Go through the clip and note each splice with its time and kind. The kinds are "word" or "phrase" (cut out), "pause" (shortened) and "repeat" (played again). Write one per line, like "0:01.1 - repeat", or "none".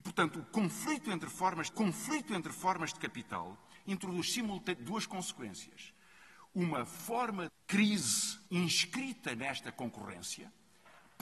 0:01.7 - repeat
0:07.5 - word
0:08.5 - pause